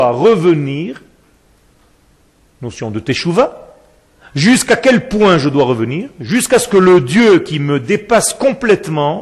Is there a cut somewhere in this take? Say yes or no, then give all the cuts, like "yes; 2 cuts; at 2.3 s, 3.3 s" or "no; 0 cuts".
no; 0 cuts